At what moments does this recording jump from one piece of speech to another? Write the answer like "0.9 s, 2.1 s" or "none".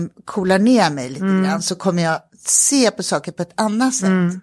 none